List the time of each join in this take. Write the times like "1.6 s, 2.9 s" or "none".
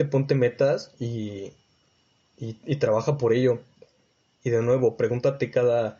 none